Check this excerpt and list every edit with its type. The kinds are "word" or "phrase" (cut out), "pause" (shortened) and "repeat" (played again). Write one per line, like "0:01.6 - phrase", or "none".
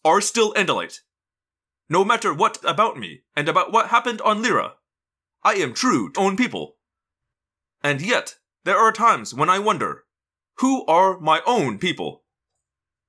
0:02.6 - phrase
0:03.3 - pause
0:06.1 - word